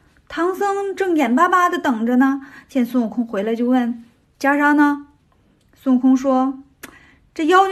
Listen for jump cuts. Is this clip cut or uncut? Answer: cut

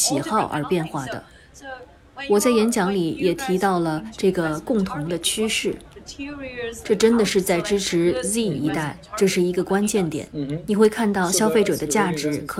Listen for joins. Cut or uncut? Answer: uncut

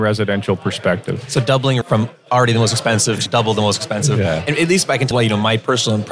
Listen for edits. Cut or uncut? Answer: cut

